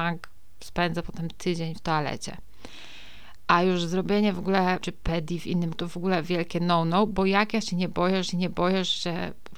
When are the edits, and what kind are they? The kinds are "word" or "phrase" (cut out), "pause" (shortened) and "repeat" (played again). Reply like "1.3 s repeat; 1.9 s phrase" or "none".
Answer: 4.8 s word; 5.7 s word; 8.2 s repeat